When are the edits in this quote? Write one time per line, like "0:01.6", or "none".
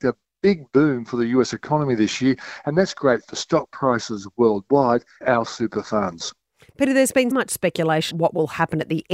0:05.2
0:07.3
0:08.1